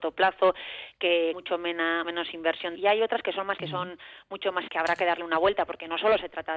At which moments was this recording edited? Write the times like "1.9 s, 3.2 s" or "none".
1.3 s, 2.0 s, 2.7 s, 3.6 s, 4.7 s